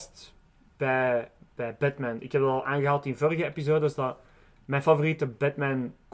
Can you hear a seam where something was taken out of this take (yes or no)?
no